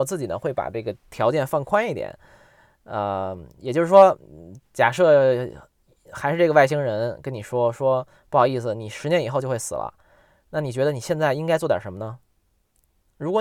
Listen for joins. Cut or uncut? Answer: uncut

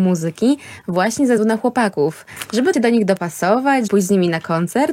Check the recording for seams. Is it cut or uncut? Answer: cut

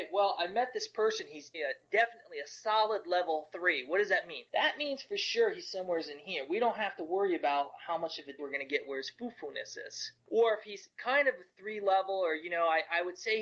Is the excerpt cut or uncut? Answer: cut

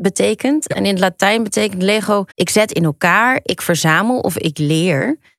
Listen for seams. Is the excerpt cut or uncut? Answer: cut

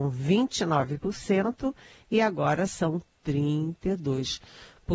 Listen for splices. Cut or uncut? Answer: uncut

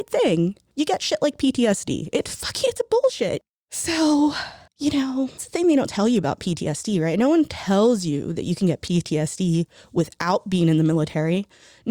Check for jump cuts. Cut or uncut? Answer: uncut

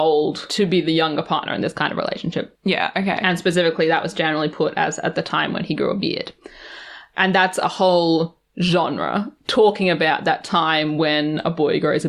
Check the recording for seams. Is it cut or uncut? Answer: uncut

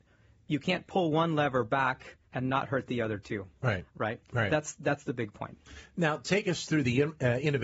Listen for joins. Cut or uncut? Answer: cut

